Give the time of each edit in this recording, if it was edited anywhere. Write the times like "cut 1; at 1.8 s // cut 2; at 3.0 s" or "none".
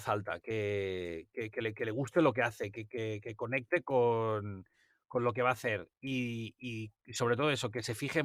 none